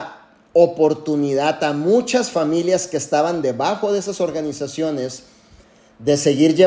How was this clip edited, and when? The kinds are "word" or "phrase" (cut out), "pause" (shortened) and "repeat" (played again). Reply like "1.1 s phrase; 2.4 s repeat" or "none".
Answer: none